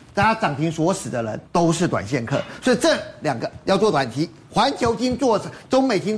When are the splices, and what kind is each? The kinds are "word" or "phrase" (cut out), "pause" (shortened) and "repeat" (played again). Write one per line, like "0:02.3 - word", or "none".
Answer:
0:01.5 - pause